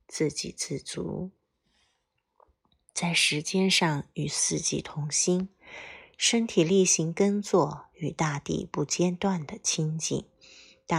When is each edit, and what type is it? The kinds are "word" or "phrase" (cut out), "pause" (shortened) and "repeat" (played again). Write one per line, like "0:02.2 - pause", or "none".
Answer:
none